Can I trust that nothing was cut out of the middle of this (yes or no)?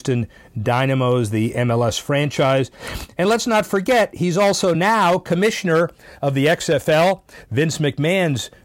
yes